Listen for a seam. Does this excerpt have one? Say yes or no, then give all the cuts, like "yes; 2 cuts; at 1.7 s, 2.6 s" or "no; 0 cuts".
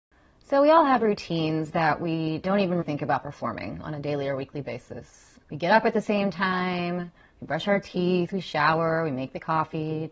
yes; 2 cuts; at 2.8 s, 5.4 s